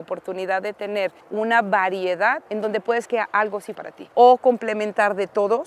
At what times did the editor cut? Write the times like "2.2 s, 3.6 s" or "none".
1.2 s, 2.5 s, 3.0 s, 3.7 s, 4.1 s